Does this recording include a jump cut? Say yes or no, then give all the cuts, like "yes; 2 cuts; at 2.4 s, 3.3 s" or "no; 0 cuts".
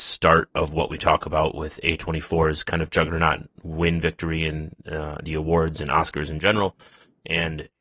no; 0 cuts